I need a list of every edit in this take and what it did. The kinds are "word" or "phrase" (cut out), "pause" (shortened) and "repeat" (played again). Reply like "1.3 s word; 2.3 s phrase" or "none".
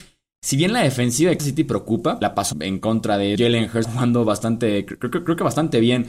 1.4 s word; 2.2 s word; 2.5 s word; 3.4 s word; 3.8 s word